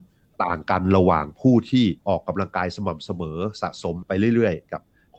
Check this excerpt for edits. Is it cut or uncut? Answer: cut